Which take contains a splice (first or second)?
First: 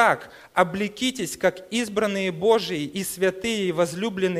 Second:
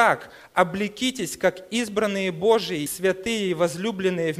second